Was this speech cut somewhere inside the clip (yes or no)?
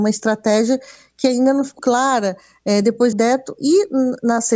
yes